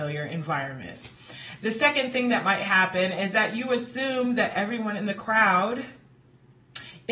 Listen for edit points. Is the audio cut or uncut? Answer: uncut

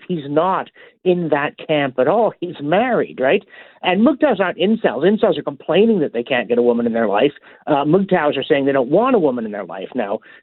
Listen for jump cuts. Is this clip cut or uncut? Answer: cut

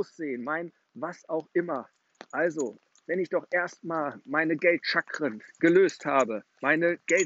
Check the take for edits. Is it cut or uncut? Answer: uncut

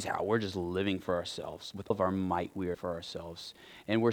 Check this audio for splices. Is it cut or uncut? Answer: cut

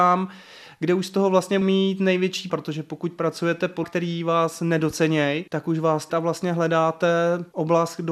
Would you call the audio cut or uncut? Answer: cut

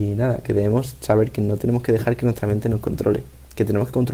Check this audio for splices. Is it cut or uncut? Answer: uncut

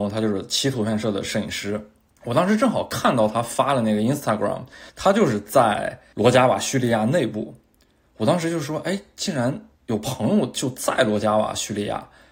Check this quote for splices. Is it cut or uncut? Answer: cut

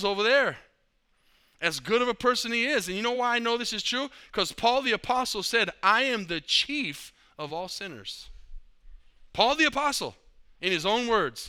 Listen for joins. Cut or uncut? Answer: uncut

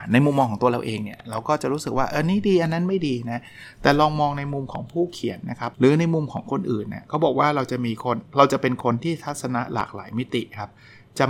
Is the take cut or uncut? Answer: cut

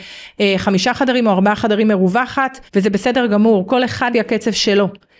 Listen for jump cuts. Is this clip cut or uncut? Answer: cut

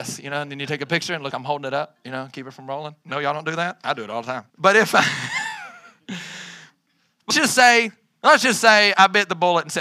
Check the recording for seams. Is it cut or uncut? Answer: cut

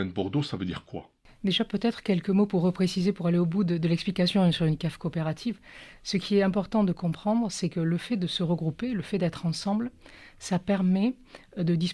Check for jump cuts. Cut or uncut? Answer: uncut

